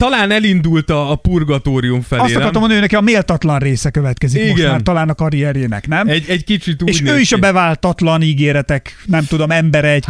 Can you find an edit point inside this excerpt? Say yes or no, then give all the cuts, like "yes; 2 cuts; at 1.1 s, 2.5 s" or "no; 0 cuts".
no; 0 cuts